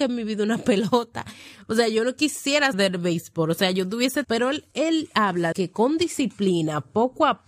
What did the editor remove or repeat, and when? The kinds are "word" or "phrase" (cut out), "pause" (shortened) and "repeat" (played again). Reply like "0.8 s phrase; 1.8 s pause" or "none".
2.7 s word; 4.2 s word; 5.5 s word